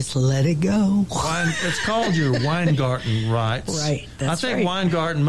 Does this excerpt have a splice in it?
no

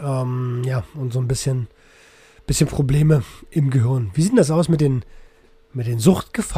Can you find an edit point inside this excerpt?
no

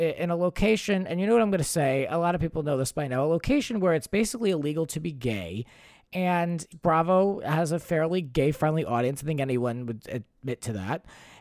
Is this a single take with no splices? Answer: no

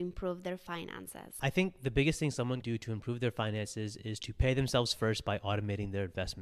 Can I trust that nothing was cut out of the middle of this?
no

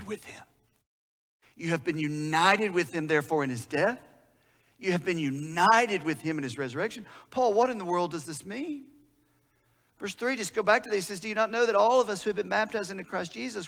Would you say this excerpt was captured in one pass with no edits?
yes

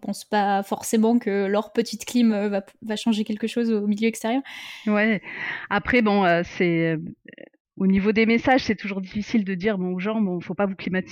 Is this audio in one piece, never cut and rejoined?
yes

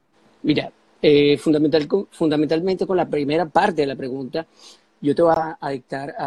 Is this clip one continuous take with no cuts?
yes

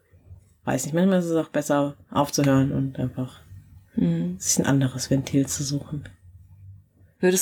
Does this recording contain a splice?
no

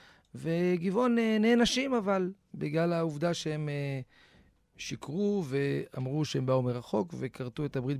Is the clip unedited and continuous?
yes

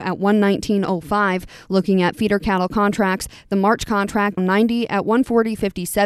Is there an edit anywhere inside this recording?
yes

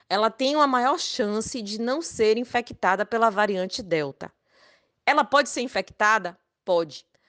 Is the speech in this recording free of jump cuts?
yes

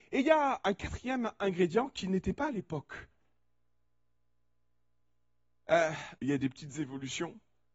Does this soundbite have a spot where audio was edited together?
yes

